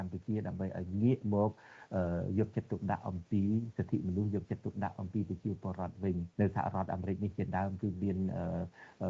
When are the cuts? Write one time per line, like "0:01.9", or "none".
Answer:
0:06.3